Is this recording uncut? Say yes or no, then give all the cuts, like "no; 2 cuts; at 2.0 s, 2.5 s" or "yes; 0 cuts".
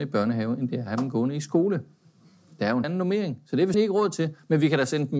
no; 2 cuts; at 2.8 s, 3.7 s